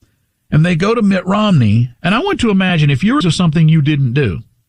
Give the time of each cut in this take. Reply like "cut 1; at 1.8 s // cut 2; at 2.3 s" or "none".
cut 1; at 1.9 s // cut 2; at 2.4 s // cut 3; at 3.2 s